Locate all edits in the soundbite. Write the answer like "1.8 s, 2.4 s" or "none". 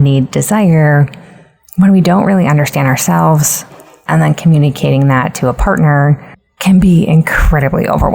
none